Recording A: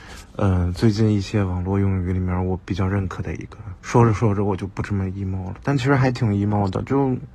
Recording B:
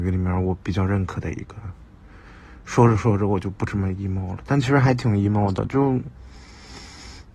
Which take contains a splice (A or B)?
A